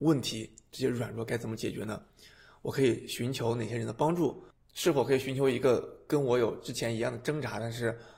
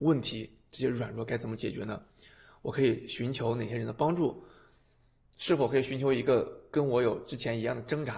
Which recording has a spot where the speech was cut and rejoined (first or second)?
first